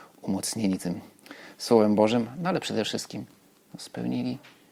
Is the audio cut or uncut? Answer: uncut